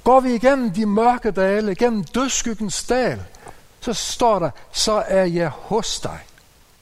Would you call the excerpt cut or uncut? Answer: uncut